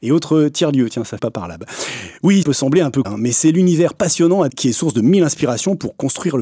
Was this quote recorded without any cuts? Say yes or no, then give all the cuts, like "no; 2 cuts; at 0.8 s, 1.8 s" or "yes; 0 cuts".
no; 4 cuts; at 1.2 s, 2.4 s, 3.0 s, 4.5 s